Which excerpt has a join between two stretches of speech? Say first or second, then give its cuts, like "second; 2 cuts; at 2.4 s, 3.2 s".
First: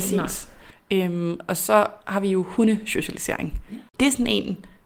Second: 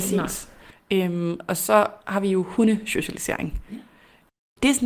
first; 1 cut; at 3.9 s